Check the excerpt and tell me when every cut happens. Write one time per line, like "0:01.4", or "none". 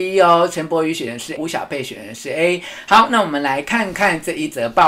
0:01.4

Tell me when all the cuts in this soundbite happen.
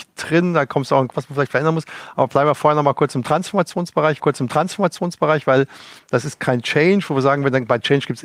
0:01.1
0:04.2

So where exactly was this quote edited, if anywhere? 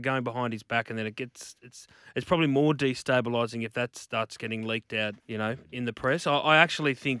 0:05.2

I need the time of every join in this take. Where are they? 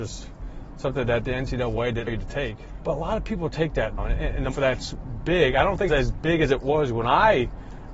0:02.1
0:02.8
0:04.0
0:04.5
0:05.9

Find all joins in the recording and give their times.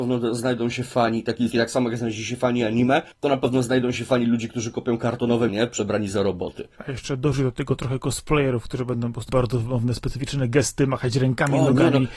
0:01.5
0:03.1
0:05.5
0:06.8
0:09.3

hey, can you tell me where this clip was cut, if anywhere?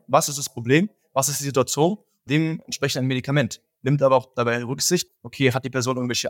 0:02.3
0:05.1

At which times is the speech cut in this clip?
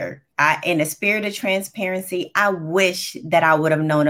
none

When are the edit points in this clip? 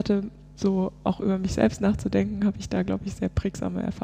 none

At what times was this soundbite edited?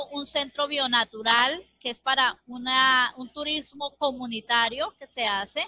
none

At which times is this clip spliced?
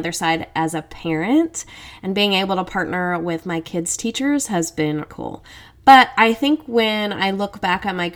0:05.1

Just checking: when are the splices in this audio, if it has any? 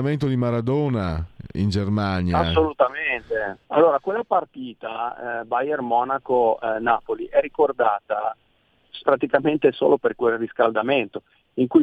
0:03.6
0:09.0

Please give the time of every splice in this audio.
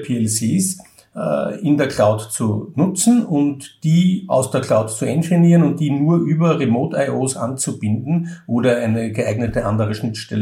none

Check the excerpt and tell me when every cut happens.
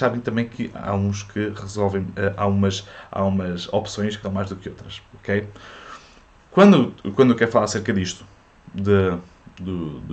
0:04.2

